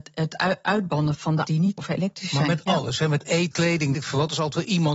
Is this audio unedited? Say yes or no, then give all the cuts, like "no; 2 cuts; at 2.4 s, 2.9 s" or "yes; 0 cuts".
no; 5 cuts; at 1.1 s, 1.4 s, 1.8 s, 3.5 s, 3.9 s